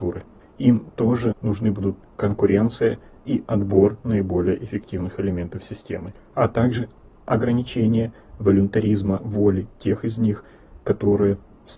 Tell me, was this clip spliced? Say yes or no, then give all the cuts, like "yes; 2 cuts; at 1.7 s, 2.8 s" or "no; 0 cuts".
no; 0 cuts